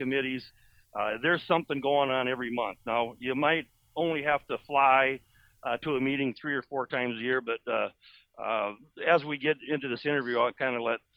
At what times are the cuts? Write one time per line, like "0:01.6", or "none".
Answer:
none